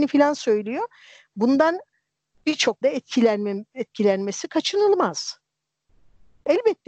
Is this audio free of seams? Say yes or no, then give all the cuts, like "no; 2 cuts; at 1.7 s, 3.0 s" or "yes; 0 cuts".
no; 1 cut; at 2.8 s